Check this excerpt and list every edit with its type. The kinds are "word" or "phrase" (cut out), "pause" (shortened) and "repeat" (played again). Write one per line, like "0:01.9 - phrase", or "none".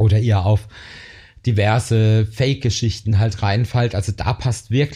none